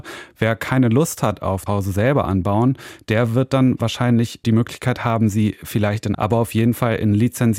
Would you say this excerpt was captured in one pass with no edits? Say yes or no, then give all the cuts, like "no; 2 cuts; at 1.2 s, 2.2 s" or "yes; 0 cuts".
no; 2 cuts; at 1.7 s, 6.1 s